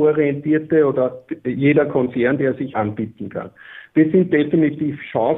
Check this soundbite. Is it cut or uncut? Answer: cut